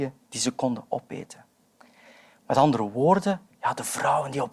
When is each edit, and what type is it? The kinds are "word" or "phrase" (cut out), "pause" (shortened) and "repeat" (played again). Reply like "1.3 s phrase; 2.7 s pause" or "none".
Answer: none